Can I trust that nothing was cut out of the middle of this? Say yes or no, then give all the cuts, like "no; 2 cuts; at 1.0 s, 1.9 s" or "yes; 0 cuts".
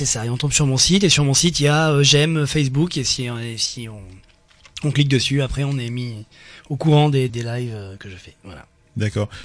no; 1 cut; at 7.3 s